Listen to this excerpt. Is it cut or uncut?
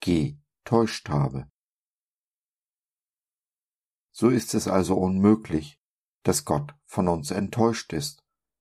uncut